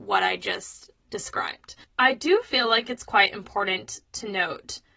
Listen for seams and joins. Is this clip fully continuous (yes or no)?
yes